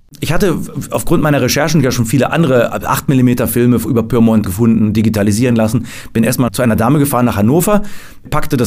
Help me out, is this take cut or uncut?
cut